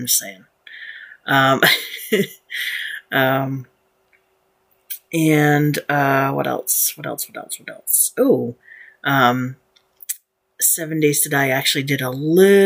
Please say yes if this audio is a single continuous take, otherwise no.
yes